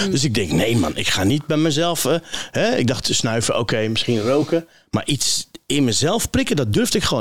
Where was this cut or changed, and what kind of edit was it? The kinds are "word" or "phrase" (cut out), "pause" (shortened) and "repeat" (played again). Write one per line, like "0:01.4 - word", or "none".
none

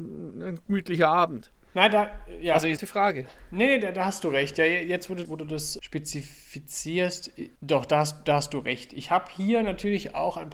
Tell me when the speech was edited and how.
0:02.8 - word
0:05.2 - word
0:07.6 - pause

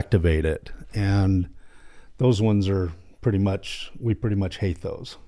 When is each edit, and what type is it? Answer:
none

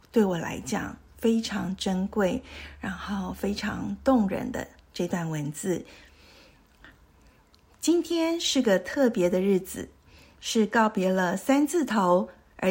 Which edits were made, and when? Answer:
none

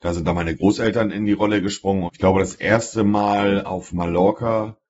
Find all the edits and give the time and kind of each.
0:02.1 - word

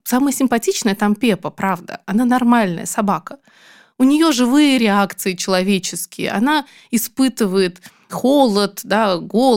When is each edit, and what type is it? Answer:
none

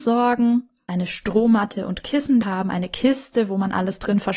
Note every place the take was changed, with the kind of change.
0:02.4 - word

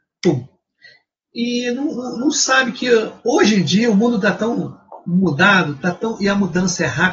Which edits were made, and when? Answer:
none

